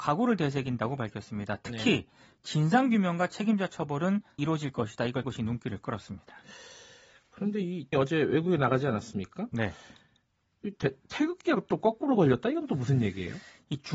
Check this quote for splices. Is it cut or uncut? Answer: cut